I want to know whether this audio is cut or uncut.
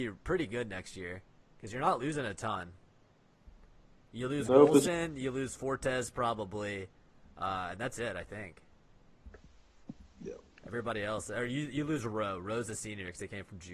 uncut